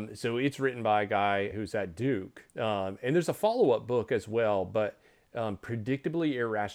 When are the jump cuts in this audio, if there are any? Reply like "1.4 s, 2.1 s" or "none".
1.5 s, 2.5 s